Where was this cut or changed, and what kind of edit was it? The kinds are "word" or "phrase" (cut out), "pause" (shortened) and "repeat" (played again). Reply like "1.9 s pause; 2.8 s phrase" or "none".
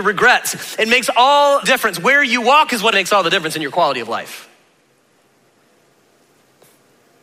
1.6 s word; 2.9 s word